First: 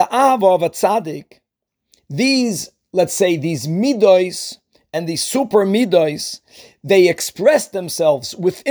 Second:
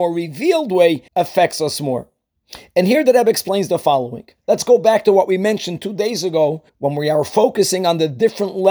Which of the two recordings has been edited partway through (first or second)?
second